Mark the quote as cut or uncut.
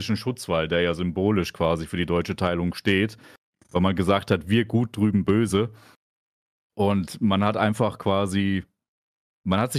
uncut